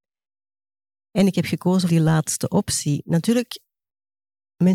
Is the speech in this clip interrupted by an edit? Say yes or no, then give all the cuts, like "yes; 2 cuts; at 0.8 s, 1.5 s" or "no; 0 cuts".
yes; 1 cut; at 1.9 s